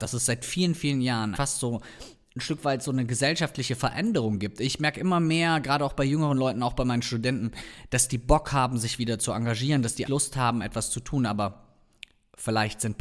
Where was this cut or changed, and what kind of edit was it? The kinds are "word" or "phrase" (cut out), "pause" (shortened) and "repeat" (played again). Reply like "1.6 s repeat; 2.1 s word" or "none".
1.3 s word; 10.1 s word

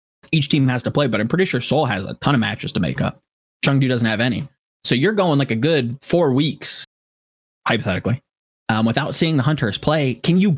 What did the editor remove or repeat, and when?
none

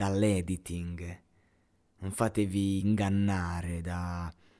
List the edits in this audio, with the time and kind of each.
none

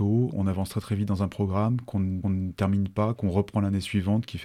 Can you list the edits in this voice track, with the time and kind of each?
2.2 s repeat

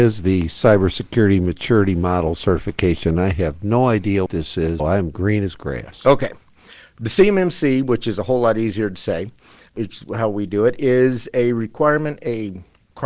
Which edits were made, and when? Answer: 4.3 s word; 4.8 s word

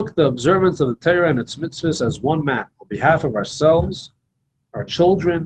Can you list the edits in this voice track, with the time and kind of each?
2.7 s pause

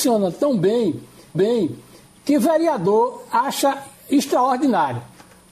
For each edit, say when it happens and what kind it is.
1.3 s repeat

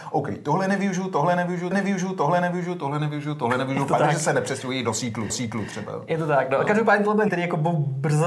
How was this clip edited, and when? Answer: 1.7 s repeat; 5.3 s repeat; 7.3 s word

